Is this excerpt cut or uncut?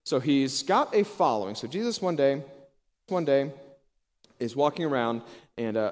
cut